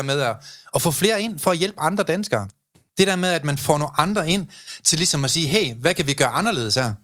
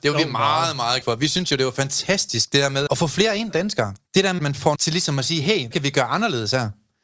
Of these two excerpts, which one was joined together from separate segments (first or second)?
second